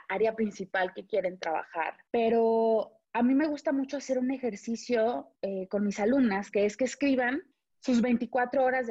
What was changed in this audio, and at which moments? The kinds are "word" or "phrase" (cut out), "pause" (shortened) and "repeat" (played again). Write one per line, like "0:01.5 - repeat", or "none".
0:02.1 - pause
0:05.4 - pause
0:07.5 - pause